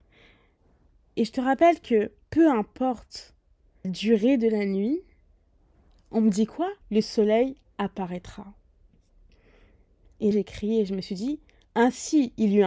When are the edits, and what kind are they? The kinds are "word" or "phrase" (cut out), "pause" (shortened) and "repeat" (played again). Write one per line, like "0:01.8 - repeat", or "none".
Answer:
0:02.2 - pause
0:03.8 - word
0:06.8 - pause
0:10.3 - word